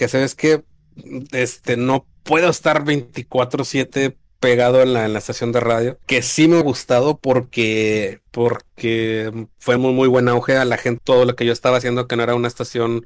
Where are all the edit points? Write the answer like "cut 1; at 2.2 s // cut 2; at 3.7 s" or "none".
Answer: cut 1; at 2.2 s // cut 2; at 6.0 s // cut 3; at 6.6 s // cut 4; at 8.3 s // cut 5; at 9.8 s // cut 6; at 11.0 s